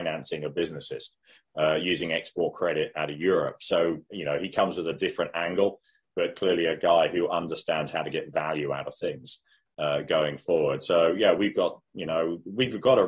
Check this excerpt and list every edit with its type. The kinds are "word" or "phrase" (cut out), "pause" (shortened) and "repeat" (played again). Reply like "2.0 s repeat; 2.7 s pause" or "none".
none